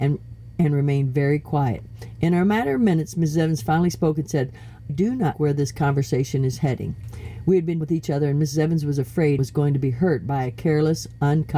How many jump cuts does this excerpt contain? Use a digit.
4